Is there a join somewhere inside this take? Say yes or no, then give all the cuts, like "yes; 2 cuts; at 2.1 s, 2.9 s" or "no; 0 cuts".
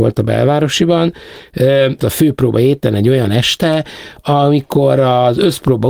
yes; 1 cut; at 2.0 s